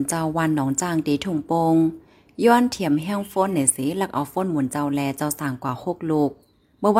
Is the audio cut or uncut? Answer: uncut